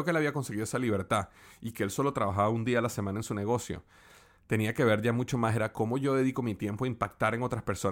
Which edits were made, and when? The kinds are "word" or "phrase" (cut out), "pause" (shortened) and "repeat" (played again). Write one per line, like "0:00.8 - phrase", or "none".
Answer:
0:05.7 - word